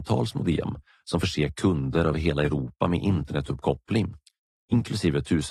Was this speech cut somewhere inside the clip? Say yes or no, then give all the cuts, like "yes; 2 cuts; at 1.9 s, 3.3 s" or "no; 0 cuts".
no; 0 cuts